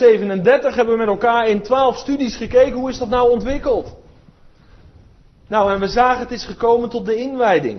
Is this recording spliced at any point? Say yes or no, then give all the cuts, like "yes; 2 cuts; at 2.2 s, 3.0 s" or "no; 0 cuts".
no; 0 cuts